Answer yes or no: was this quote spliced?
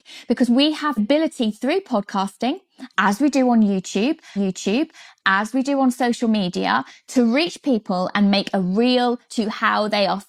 yes